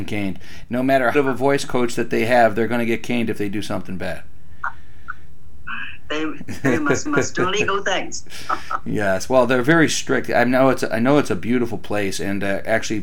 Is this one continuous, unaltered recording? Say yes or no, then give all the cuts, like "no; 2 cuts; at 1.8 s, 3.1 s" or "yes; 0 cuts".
no; 2 cuts; at 1.1 s, 7.1 s